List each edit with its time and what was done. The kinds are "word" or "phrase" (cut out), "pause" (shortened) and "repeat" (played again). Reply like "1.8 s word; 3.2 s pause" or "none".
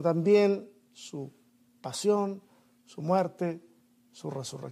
none